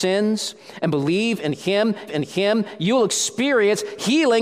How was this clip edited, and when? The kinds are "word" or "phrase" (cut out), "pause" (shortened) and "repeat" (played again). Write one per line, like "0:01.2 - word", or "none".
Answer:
0:02.1 - repeat